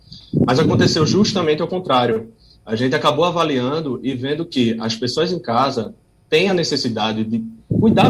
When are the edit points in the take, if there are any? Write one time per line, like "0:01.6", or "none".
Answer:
none